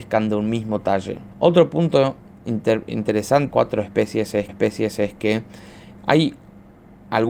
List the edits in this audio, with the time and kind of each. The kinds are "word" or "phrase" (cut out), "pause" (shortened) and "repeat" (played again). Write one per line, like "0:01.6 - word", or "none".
0:01.3 - pause
0:02.3 - pause
0:03.5 - phrase
0:04.5 - repeat